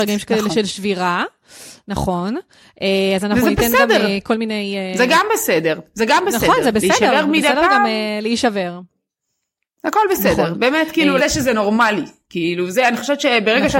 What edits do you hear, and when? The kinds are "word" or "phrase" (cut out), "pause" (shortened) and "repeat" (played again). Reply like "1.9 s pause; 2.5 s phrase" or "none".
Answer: 11.2 s phrase